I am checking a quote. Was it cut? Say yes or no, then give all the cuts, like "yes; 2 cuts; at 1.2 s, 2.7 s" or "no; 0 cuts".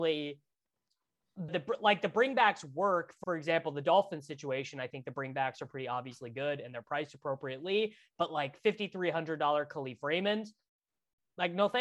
yes; 2 cuts; at 1.5 s, 3.2 s